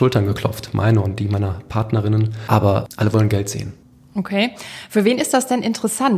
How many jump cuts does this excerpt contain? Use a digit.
1